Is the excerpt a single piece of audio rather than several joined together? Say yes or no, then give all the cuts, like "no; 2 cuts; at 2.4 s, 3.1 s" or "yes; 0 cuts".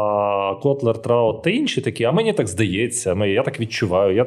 yes; 0 cuts